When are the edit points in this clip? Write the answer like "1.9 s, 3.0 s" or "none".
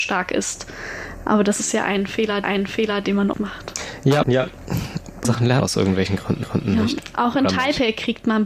2.4 s, 3.3 s, 4.2 s, 5.2 s, 5.6 s, 6.4 s